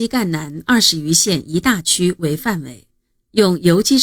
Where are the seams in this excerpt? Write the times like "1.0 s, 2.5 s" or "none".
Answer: none